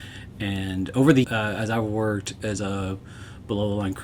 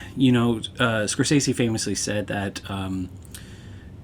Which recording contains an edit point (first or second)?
first